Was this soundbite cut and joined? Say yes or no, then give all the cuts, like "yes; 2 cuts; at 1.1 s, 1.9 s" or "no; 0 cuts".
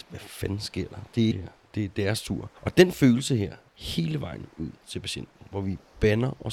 yes; 3 cuts; at 1.3 s, 2.6 s, 3.7 s